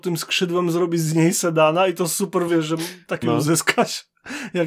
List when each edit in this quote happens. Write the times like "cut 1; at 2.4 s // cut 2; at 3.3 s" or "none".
cut 1; at 2.5 s // cut 2; at 3.2 s